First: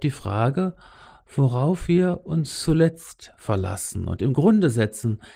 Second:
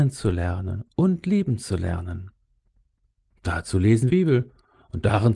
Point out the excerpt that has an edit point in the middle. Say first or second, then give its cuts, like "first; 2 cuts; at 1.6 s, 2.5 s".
second; 1 cut; at 4.1 s